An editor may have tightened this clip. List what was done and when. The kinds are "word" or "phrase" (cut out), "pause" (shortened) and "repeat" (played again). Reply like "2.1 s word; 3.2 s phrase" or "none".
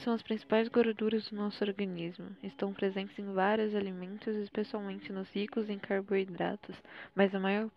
none